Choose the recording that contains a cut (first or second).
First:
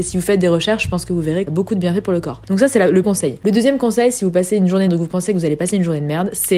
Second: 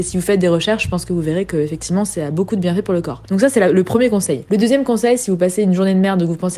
first